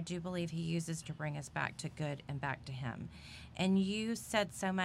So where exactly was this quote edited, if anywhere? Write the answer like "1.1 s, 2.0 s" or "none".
1.0 s